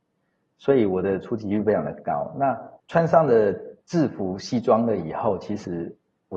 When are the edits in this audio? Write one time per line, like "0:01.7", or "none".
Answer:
0:02.8
0:03.8